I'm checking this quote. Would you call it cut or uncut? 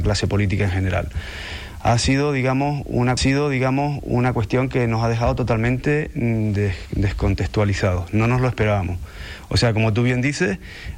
cut